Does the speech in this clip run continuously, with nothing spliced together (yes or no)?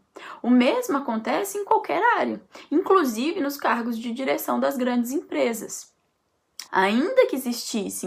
no